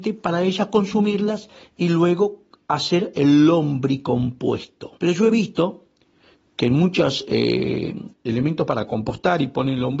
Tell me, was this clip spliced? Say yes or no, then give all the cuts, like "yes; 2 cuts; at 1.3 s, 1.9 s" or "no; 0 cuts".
yes; 2 cuts; at 5.0 s, 8.1 s